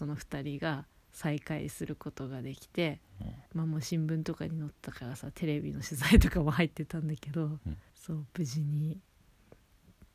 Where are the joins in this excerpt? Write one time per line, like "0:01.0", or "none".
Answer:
0:03.5
0:07.9